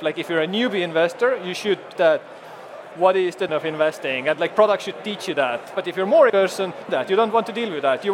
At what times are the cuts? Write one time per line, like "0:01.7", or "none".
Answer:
0:01.9
0:02.9
0:03.5
0:04.5
0:05.7
0:06.3
0:06.9